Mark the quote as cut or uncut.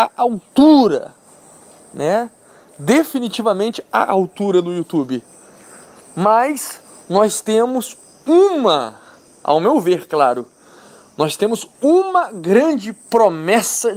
uncut